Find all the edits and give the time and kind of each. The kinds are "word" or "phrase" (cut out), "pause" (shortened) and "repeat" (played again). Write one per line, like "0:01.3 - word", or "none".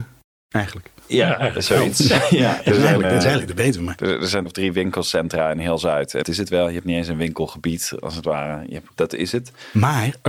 0:04.5 - word
0:06.2 - word
0:09.0 - word